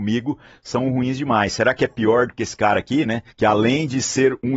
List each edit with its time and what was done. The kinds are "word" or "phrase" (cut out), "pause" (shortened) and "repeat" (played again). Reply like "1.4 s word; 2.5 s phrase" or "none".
3.3 s pause